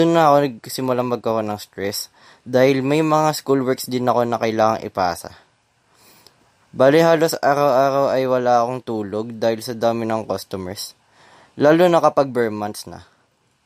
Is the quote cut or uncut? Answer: uncut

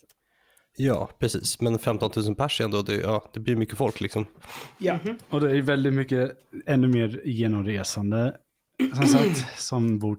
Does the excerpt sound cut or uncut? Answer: uncut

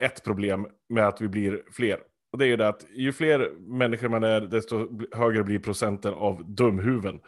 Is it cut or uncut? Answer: uncut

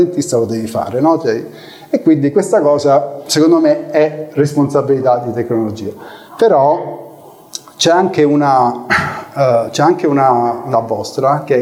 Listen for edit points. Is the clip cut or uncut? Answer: cut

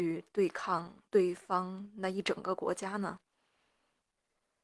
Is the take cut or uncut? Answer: cut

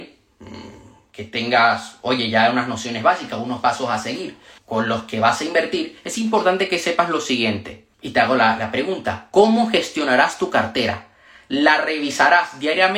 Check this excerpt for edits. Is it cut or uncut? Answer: cut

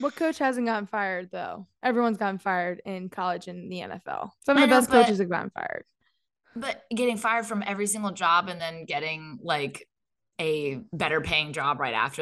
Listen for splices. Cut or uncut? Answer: uncut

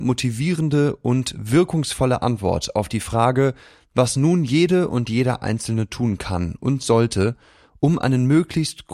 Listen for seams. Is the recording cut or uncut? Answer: uncut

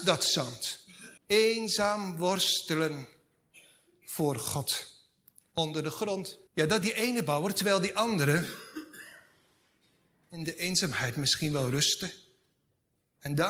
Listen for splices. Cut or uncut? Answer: cut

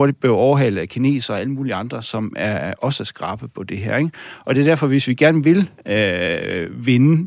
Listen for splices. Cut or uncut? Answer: uncut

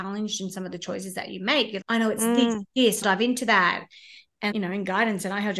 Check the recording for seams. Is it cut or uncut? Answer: cut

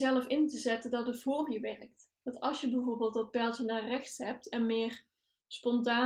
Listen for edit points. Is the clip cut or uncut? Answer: uncut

